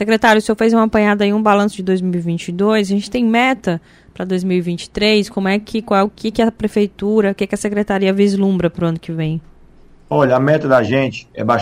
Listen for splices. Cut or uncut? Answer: uncut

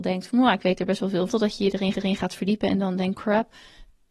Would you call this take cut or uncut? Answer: cut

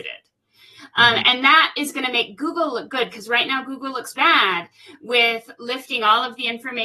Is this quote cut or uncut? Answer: cut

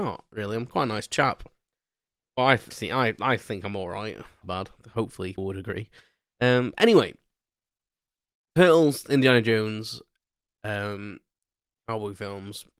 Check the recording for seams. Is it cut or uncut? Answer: cut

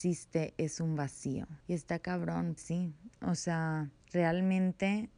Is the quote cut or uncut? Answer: cut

